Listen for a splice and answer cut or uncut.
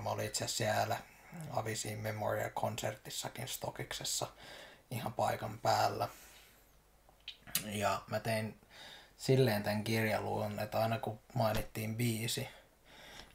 uncut